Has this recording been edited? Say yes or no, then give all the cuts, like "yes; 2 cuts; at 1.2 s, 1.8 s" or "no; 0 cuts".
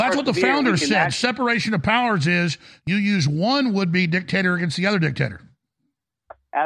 no; 0 cuts